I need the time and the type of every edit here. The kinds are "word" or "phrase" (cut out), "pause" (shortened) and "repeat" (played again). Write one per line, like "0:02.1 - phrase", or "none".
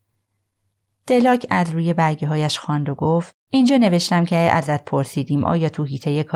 0:03.4 - pause